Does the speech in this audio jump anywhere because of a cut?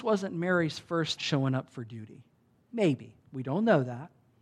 yes; 2 cuts; at 1.2 s, 2.5 s

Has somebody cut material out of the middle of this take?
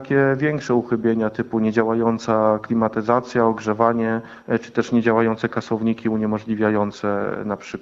no; 0 cuts

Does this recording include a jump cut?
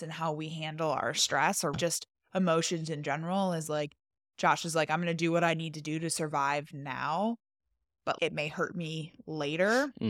yes; 1 cut; at 1.7 s

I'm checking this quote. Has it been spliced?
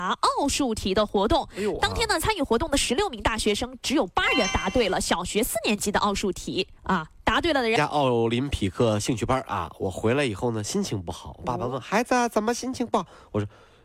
yes; 1 cut; at 6.8 s

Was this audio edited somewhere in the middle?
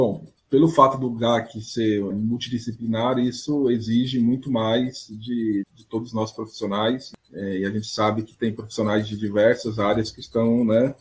yes; 2 cuts; at 2.1 s, 5.6 s

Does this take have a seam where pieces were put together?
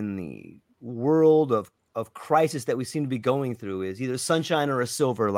yes; 1 cut; at 1.8 s

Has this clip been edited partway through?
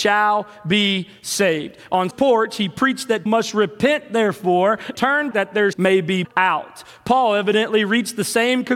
yes; 6 cuts; at 2.1 s, 3.3 s, 4.9 s, 5.3 s, 5.7 s, 6.2 s

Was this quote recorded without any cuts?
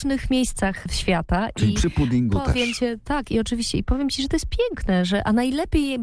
yes; 0 cuts

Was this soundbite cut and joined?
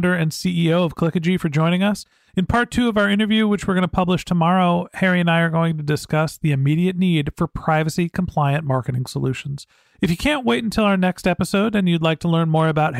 no; 0 cuts

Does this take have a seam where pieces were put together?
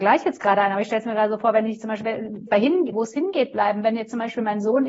yes; 3 cuts; at 2.0 s, 2.5 s, 2.9 s

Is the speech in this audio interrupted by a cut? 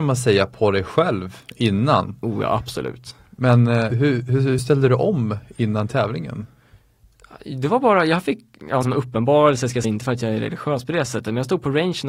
yes; 4 cuts; at 3.9 s, 4.6 s, 8.8 s, 9.8 s

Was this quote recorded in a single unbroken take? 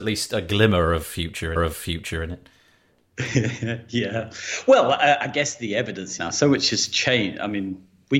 no; 2 cuts; at 1.6 s, 6.2 s

